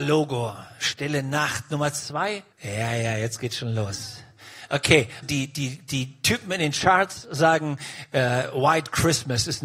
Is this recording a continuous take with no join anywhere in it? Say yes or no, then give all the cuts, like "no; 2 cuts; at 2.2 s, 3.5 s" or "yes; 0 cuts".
no; 2 cuts; at 2.5 s, 5.2 s